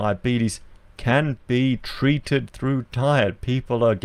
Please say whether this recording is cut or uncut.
uncut